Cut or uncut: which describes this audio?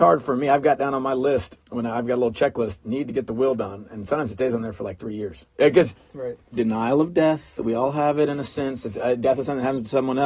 cut